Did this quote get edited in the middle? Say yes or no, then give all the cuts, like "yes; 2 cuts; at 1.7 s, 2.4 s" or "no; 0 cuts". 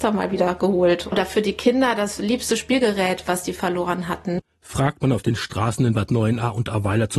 no; 0 cuts